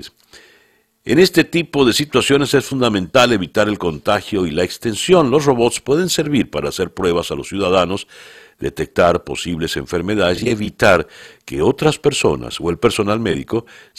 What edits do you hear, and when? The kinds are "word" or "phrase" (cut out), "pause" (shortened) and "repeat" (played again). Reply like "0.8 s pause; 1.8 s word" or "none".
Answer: none